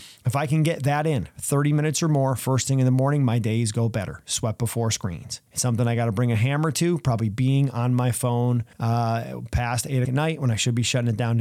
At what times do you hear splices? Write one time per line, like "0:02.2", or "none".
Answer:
0:05.5
0:08.7
0:10.0